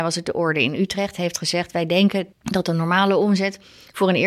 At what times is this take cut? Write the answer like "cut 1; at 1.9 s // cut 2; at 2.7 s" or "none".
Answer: cut 1; at 2.3 s